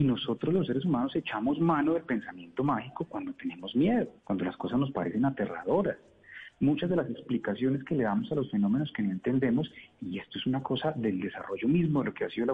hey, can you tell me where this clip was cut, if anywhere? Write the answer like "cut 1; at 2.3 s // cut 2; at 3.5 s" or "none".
cut 1; at 4.2 s